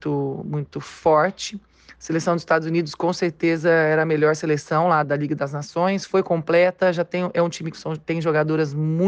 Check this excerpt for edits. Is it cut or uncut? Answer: cut